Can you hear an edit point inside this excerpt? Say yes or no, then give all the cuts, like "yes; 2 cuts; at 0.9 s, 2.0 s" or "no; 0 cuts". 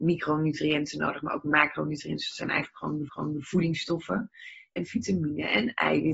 yes; 2 cuts; at 3.1 s, 4.8 s